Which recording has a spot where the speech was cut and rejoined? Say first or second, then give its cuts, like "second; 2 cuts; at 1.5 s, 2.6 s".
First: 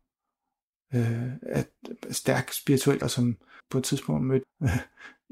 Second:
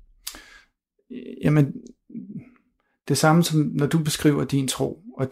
first; 3 cuts; at 3.0 s, 3.6 s, 4.4 s